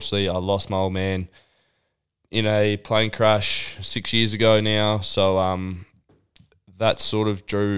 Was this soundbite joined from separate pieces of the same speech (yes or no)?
no